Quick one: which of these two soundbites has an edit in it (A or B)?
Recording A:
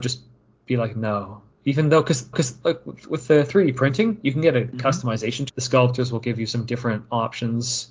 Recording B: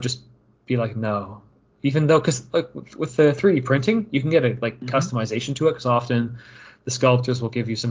A